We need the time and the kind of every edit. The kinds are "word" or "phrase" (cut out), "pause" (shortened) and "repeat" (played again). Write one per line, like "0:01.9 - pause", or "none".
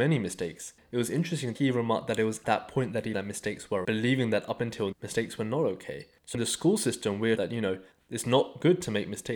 0:01.5 - word
0:02.4 - word
0:03.1 - word
0:03.8 - word
0:04.9 - word
0:06.3 - word
0:07.4 - word